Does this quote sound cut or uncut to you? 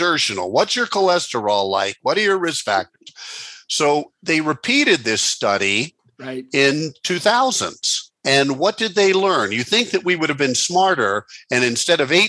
cut